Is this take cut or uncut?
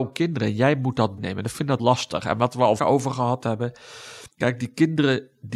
cut